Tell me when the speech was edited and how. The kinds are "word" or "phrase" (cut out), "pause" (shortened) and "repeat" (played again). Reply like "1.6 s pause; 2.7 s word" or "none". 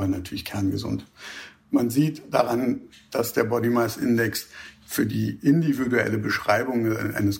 none